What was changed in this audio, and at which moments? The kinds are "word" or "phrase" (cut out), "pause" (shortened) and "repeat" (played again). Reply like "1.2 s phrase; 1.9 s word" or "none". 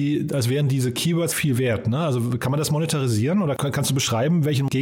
1.3 s word